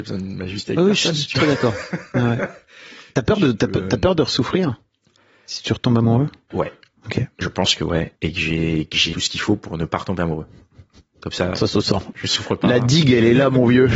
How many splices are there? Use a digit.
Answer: 3